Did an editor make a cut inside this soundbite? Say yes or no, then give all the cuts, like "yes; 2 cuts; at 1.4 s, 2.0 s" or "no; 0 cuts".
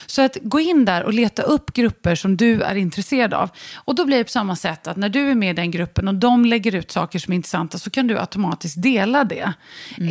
no; 0 cuts